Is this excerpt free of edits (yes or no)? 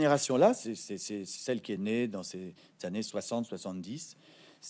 yes